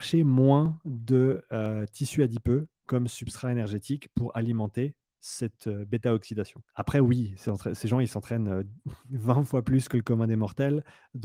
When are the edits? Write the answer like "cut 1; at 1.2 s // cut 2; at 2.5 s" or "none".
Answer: cut 1; at 6.7 s